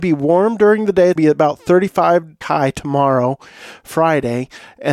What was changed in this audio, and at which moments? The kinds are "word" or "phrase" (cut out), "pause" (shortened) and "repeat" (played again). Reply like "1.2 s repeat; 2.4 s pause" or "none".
1.2 s word; 2.4 s word